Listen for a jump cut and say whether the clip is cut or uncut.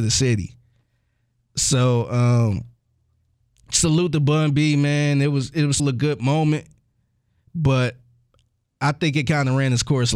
cut